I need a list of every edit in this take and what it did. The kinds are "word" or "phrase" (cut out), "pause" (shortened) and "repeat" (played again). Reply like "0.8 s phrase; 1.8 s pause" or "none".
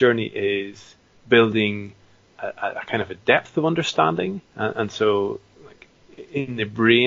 4.5 s pause